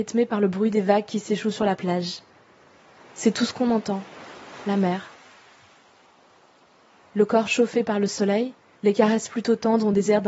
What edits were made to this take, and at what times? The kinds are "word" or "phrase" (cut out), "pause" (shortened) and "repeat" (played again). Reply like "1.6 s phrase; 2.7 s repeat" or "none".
none